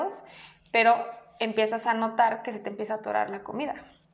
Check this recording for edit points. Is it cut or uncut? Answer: uncut